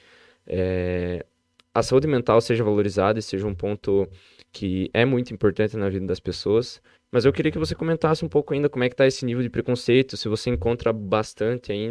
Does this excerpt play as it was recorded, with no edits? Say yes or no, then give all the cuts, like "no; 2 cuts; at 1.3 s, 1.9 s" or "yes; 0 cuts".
no; 1 cut; at 6.9 s